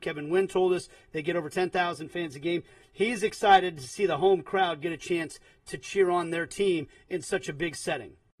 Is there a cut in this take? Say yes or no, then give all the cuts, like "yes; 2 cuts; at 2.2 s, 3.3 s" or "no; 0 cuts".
no; 0 cuts